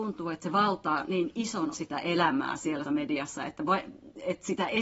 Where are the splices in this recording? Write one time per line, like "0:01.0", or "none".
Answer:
0:01.7
0:02.8